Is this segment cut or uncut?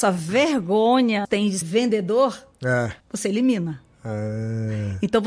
cut